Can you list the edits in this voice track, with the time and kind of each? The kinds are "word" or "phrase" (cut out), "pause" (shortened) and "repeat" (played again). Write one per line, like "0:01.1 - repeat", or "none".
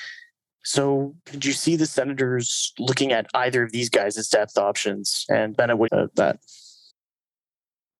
0:05.5 - word
0:05.9 - phrase